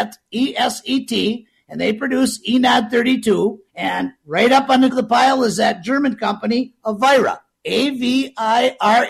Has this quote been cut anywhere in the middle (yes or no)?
yes